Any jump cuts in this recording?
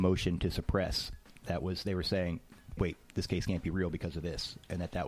yes; 1 cut; at 2.8 s

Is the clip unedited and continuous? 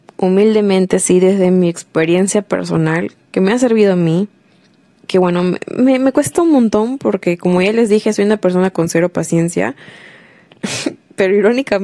yes; 0 cuts

